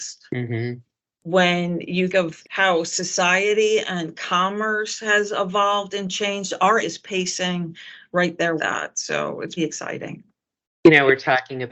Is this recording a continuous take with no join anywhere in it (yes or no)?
no